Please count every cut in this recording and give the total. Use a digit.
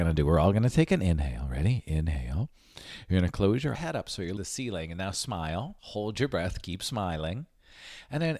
3